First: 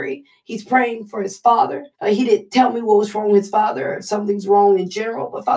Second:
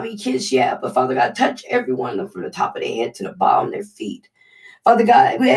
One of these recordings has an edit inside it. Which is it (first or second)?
first